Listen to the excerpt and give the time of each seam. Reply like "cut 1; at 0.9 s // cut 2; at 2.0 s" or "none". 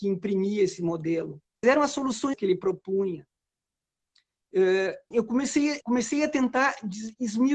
cut 1; at 1.6 s // cut 2; at 2.3 s // cut 3; at 5.1 s // cut 4; at 5.8 s